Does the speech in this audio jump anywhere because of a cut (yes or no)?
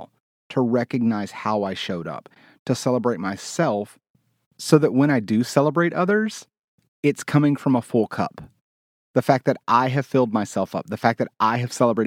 no